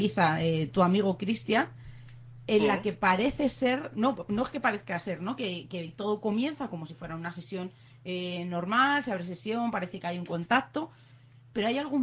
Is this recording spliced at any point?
no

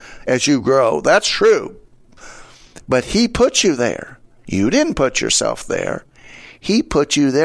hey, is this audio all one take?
yes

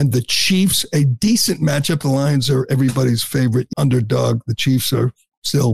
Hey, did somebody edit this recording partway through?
yes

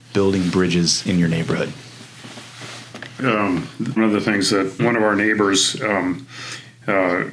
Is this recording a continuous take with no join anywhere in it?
no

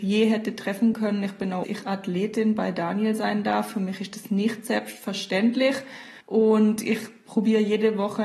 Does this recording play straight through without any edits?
no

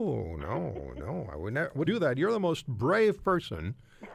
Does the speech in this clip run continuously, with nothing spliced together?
no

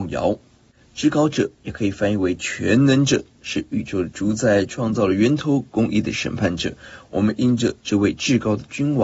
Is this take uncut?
no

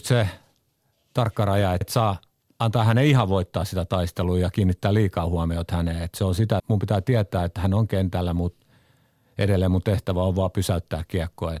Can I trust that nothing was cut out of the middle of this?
no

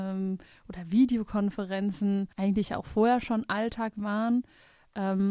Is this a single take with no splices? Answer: no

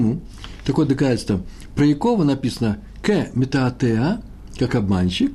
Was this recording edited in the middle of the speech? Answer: no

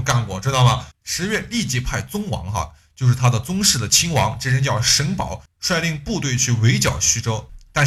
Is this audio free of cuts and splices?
no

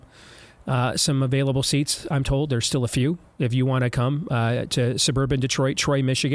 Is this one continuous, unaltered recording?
yes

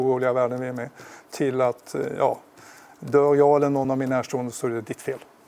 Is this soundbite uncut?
yes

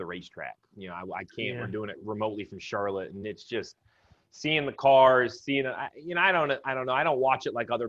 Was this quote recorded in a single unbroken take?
yes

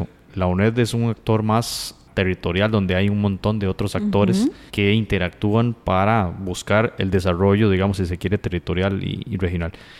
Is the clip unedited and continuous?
no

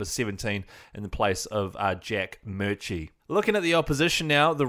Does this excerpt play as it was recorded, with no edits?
no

